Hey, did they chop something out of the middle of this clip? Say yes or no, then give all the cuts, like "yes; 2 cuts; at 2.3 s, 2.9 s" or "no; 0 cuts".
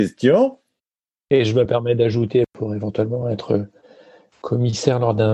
no; 0 cuts